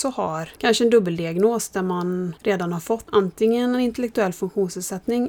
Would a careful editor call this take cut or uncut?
uncut